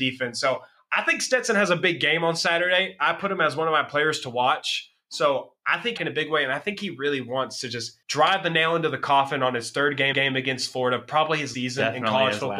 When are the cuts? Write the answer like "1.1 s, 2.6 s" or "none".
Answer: 6.0 s, 8.0 s, 10.1 s, 11.5 s